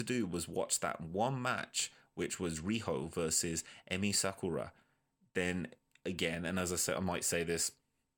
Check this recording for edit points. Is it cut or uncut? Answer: uncut